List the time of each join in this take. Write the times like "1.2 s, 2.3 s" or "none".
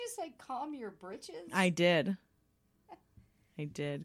none